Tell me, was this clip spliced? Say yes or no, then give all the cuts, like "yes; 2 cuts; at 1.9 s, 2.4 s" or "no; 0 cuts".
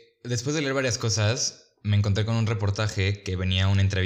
no; 0 cuts